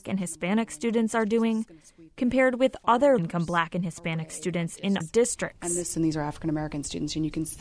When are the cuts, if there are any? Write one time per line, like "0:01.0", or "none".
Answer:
0:03.2
0:05.0
0:05.9